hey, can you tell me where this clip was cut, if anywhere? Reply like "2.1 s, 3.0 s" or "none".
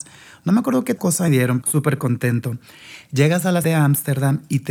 1.0 s, 1.3 s, 1.6 s, 3.6 s